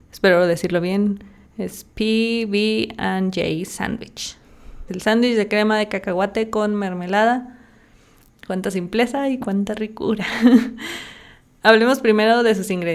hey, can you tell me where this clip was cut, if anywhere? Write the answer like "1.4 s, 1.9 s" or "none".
4.9 s